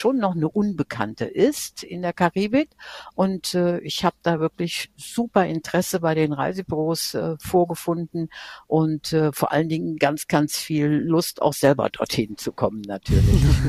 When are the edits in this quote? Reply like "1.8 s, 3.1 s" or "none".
none